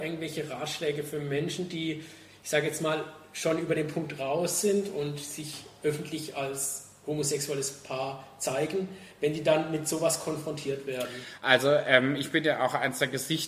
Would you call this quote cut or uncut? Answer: uncut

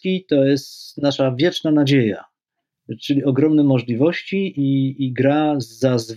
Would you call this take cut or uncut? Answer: uncut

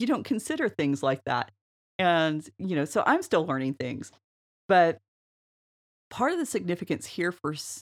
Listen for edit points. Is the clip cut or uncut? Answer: uncut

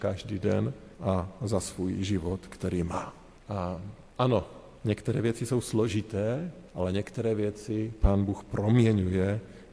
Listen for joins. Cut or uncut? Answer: cut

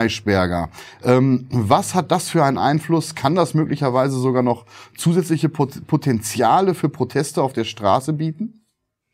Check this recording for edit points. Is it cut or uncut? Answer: uncut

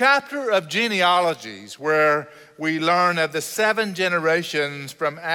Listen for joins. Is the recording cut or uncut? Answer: uncut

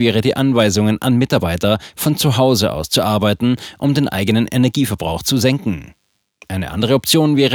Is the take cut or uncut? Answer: uncut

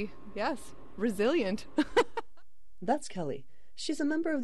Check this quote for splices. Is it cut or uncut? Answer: uncut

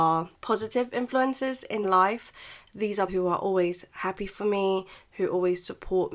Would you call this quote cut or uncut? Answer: cut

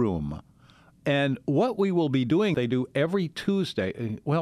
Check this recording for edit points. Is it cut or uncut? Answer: cut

